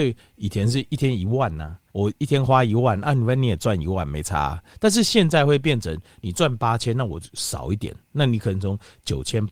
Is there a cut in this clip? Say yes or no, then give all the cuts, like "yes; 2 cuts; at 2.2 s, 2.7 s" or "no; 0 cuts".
yes; 1 cut; at 1.9 s